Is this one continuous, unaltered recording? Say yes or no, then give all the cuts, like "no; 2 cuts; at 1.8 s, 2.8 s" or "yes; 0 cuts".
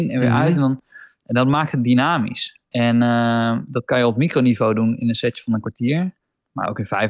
no; 2 cuts; at 2.6 s, 6.2 s